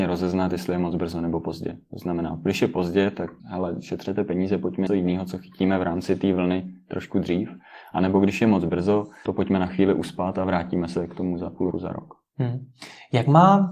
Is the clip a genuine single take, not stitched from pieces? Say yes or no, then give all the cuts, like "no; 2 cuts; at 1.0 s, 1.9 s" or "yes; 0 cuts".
no; 4 cuts; at 3.4 s, 4.9 s, 9.3 s, 11.7 s